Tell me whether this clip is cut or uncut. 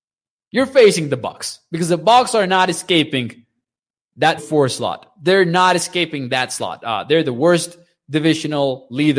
cut